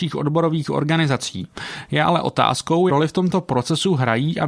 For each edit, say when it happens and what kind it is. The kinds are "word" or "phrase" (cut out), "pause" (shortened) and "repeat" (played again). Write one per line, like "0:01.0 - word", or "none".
0:02.9 - word